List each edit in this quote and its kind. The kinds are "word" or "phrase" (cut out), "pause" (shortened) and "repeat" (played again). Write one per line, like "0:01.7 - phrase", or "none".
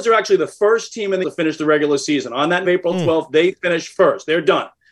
0:01.2 - word
0:02.6 - phrase